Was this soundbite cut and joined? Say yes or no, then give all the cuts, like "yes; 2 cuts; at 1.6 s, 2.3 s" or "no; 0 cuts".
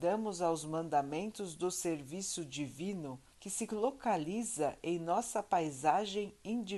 yes; 1 cut; at 3.3 s